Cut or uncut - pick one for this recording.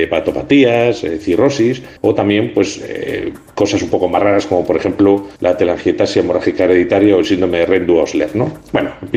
cut